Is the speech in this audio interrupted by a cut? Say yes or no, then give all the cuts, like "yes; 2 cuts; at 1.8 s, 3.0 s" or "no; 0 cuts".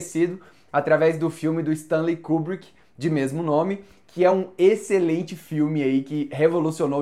no; 0 cuts